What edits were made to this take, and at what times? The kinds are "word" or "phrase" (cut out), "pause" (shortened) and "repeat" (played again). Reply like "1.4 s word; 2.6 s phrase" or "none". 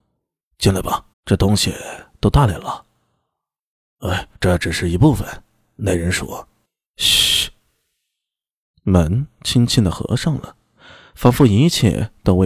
1.1 s pause; 4.4 s pause